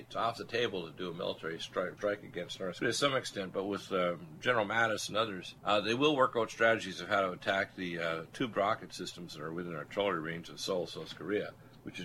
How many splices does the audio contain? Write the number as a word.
three